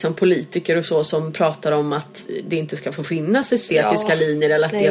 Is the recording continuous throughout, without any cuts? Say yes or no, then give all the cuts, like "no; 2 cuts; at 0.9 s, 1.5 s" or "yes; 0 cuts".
yes; 0 cuts